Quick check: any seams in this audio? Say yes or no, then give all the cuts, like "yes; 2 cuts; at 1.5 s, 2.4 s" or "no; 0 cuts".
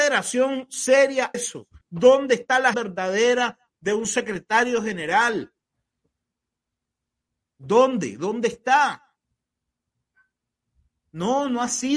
yes; 3 cuts; at 1.3 s, 1.8 s, 2.7 s